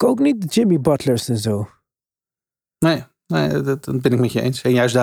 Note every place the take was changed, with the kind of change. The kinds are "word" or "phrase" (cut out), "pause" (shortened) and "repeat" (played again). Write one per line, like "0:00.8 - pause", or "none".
none

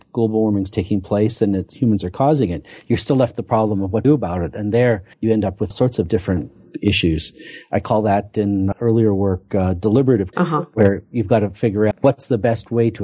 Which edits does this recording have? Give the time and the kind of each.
0:04.0 - word
0:05.1 - pause
0:05.7 - word
0:08.7 - word
0:10.3 - word
0:11.9 - word

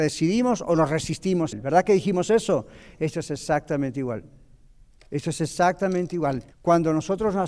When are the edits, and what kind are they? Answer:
0:01.5 - word
0:06.5 - pause

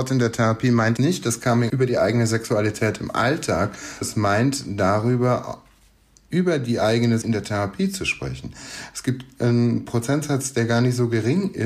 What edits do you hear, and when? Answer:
0:01.0 - word
0:01.7 - word
0:04.0 - word
0:07.2 - word

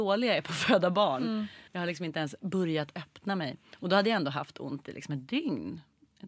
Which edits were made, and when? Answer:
0:01.7 - pause

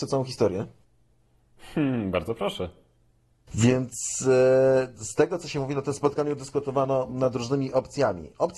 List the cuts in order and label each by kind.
none

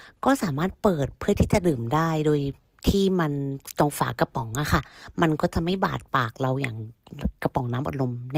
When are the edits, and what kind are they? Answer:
none

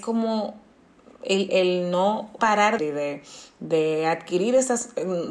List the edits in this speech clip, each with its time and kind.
0:01.5 - word
0:02.4 - word
0:02.8 - phrase

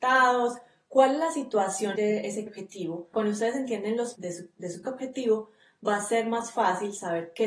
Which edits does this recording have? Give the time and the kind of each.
0:02.0 - word
0:02.5 - word
0:03.1 - word
0:04.1 - word
0:04.8 - word

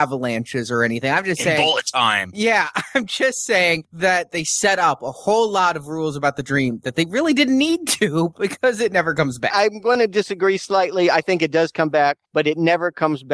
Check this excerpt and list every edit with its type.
0:12.2 - pause

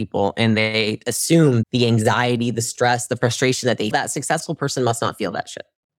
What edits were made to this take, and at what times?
0:01.6 - word
0:03.9 - word

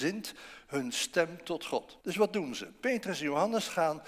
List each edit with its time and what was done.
0:02.0 - pause

